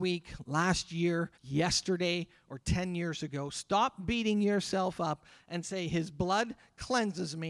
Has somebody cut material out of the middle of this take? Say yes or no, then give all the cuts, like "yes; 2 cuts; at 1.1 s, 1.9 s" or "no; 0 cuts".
yes; 1 cut; at 1.3 s